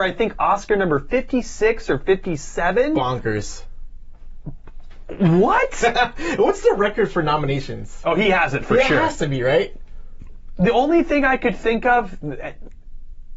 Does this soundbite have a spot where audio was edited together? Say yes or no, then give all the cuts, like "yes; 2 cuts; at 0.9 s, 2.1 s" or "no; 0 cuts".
no; 0 cuts